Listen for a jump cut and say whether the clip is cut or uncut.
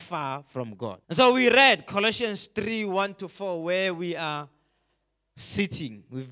cut